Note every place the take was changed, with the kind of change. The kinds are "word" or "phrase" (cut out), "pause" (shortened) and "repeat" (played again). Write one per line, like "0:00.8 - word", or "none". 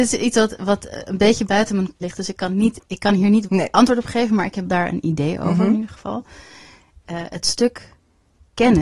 0:02.0 - word
0:02.8 - pause
0:03.5 - word
0:04.7 - word